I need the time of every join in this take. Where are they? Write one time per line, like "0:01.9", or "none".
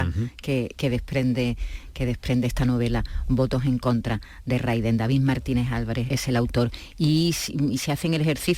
0:06.1